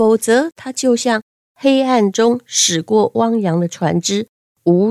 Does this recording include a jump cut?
no; 0 cuts

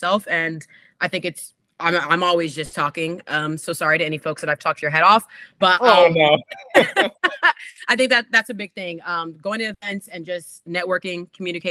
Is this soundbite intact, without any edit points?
yes; 0 cuts

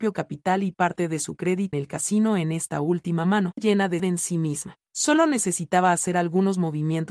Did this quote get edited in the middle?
yes; 3 cuts; at 1.7 s, 3.6 s, 4.0 s

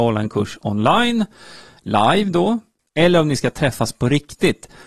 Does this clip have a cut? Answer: no; 0 cuts

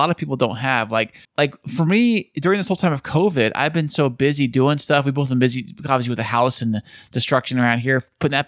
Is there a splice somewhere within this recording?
yes; 1 cut; at 1.2 s

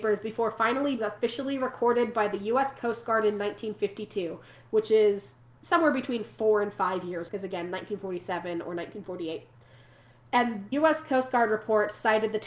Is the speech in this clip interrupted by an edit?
yes; 4 cuts; at 1.0 s, 5.6 s, 7.3 s, 10.7 s

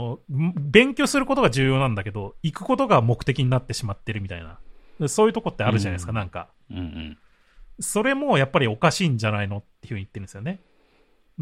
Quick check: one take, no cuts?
no; 1 cut; at 6.5 s

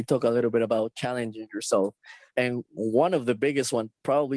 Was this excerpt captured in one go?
yes; 0 cuts

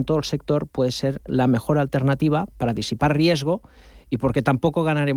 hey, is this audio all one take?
yes; 0 cuts

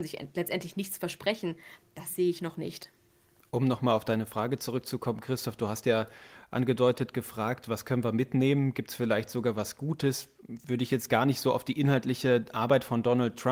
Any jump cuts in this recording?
no; 0 cuts

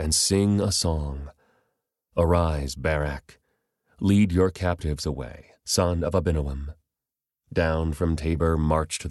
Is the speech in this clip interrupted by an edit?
no; 0 cuts

